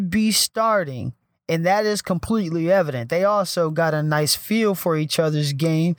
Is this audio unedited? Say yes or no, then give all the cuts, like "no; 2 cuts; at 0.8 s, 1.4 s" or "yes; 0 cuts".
yes; 0 cuts